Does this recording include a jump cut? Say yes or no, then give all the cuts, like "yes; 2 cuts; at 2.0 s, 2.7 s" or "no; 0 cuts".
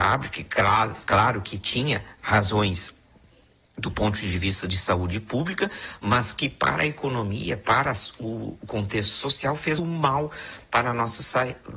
yes; 1 cut; at 9.8 s